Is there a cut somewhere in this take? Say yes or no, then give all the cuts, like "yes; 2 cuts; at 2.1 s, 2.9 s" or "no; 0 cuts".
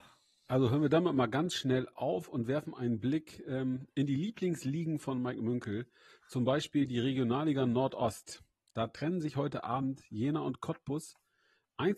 no; 0 cuts